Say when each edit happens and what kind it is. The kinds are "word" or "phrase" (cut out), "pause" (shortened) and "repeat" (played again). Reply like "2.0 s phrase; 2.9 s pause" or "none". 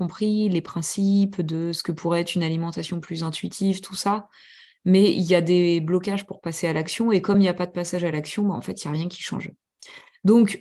none